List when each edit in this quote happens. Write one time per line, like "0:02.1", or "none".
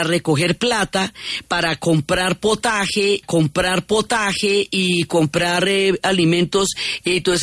0:03.2